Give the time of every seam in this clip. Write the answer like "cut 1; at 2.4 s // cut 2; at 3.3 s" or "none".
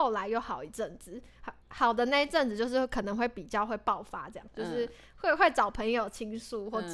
cut 1; at 1.6 s